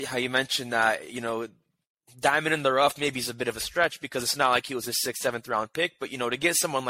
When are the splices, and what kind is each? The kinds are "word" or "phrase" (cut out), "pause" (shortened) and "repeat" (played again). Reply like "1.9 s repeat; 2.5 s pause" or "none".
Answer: none